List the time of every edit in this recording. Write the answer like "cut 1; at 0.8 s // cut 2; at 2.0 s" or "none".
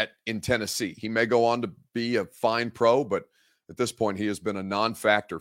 none